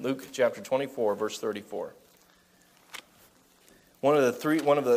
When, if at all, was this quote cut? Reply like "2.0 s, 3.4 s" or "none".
none